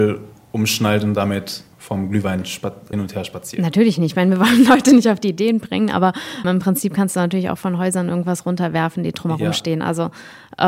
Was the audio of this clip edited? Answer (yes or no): yes